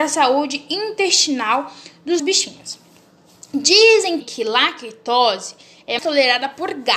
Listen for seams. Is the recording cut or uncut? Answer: cut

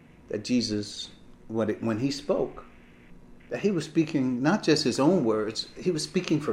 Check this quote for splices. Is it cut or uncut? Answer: uncut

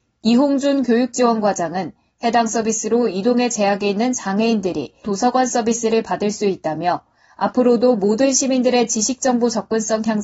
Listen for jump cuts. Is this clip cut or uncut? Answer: cut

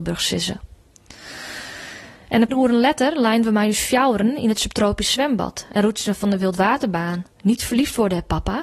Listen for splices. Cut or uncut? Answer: cut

